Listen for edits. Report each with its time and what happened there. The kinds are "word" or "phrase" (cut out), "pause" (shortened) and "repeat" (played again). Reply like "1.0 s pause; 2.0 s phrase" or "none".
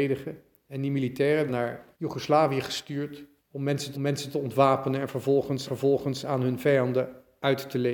1.5 s word; 1.9 s pause; 3.4 s pause; 3.9 s repeat; 5.7 s repeat